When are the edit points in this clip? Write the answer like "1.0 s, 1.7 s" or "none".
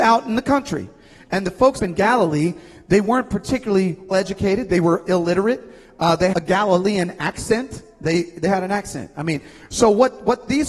1.8 s, 4.1 s, 6.3 s, 8.5 s